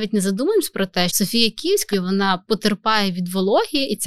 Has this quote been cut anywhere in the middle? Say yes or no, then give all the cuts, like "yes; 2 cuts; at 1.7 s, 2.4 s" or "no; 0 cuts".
yes; 2 cuts; at 1.1 s, 1.9 s